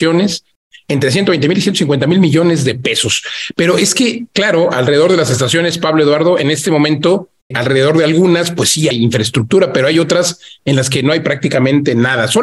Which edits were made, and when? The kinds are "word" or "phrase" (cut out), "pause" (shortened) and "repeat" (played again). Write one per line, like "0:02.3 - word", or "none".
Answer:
0:07.5 - word
0:08.9 - word